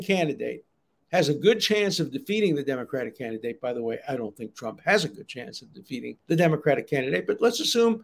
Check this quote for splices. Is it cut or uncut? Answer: cut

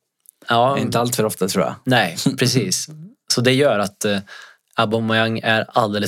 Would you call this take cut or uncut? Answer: uncut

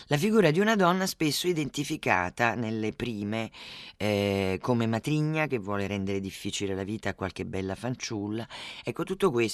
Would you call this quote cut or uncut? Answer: uncut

